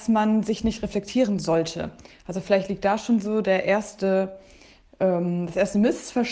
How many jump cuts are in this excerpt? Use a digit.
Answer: 0